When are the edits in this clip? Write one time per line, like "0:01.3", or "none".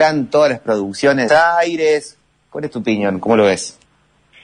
0:01.3